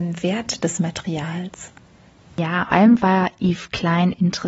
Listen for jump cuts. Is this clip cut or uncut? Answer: cut